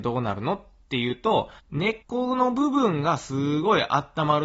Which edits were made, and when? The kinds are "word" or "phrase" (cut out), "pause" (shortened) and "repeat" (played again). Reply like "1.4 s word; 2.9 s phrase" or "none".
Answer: 1.6 s pause; 2.0 s pause